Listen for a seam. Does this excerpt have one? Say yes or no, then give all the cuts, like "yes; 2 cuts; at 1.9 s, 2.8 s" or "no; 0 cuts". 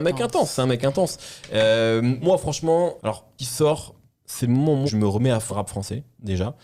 yes; 5 cuts; at 2.2 s, 3.0 s, 3.4 s, 4.9 s, 5.5 s